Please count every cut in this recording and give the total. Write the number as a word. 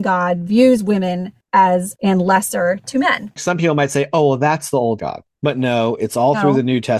two